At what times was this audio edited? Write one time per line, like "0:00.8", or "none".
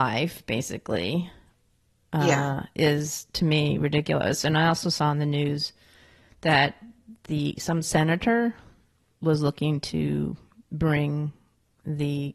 none